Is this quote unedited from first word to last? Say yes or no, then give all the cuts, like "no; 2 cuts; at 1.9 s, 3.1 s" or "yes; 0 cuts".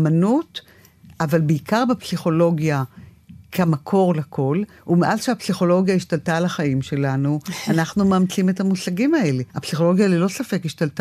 no; 1 cut; at 9.5 s